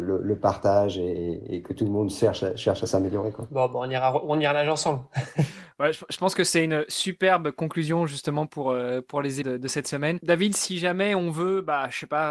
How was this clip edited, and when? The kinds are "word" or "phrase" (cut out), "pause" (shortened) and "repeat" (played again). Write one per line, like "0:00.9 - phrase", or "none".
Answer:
0:09.4 - word

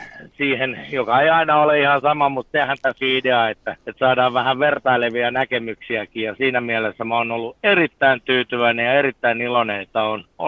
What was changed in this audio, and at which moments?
0:03.0 - word
0:03.8 - pause

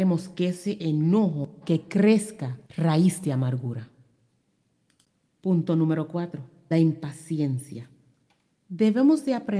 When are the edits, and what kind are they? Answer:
0:01.6 - word
0:02.6 - pause
0:06.7 - word

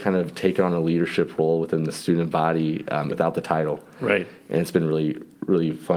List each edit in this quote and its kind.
0:03.1 - word

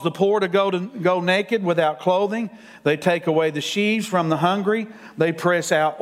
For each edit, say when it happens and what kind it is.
none

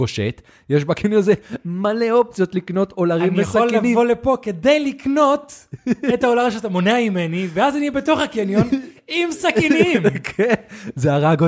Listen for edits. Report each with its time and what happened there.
none

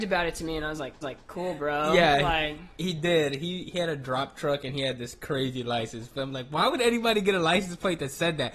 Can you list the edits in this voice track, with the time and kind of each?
0:01.0 - repeat

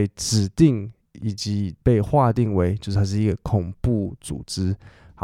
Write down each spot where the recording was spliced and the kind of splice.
0:01.8 - pause

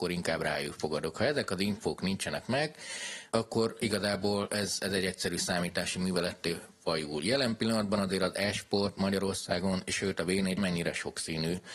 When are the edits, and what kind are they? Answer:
0:10.6 - phrase

